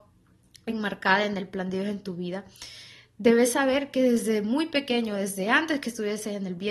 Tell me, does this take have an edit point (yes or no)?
no